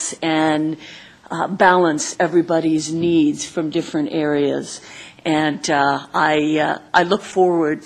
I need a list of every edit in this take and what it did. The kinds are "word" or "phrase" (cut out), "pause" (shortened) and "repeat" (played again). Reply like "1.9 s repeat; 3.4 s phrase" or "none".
none